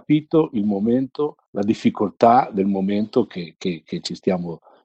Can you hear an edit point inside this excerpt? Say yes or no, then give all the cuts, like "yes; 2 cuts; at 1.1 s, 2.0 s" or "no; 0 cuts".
yes; 1 cut; at 1.5 s